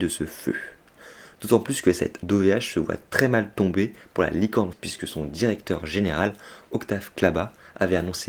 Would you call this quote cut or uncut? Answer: cut